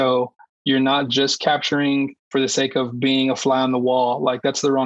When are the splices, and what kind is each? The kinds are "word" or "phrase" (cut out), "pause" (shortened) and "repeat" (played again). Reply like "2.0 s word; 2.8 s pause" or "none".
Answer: 2.2 s pause